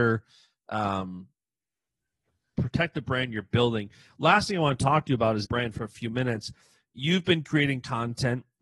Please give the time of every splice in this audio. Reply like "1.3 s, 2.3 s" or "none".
5.4 s